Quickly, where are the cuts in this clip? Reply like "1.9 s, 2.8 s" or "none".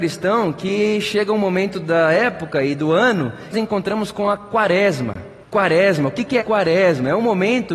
3.5 s, 5.4 s, 6.4 s